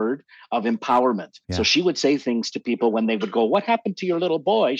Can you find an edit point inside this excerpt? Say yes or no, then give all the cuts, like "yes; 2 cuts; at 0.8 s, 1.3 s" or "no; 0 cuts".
yes; 1 cut; at 1.4 s